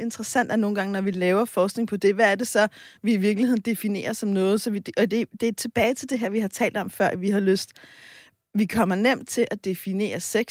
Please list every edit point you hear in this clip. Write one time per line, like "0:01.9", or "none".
none